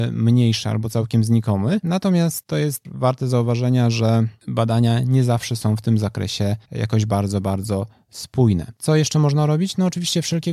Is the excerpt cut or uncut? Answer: cut